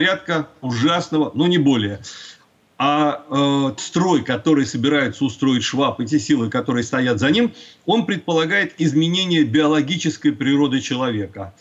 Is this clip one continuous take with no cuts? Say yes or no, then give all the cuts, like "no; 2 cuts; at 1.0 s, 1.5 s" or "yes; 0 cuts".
no; 1 cut; at 3.8 s